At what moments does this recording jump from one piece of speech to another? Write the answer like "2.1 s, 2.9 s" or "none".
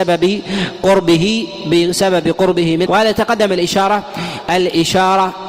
2.9 s